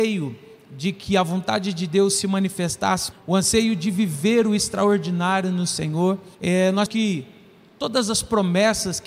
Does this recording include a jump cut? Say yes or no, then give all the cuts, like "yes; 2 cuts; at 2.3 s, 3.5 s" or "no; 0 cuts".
yes; 3 cuts; at 3.1 s, 6.3 s, 6.9 s